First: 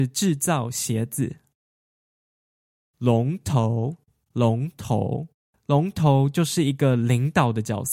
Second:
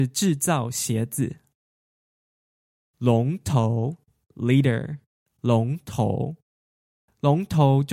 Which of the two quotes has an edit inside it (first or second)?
first